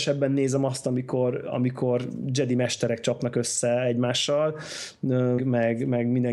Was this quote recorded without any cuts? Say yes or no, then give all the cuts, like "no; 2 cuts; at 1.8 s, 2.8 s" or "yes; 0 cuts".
no; 1 cut; at 5.4 s